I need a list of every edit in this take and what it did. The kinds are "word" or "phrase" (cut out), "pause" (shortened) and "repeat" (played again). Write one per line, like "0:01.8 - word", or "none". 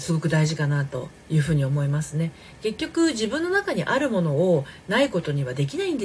0:01.2 - pause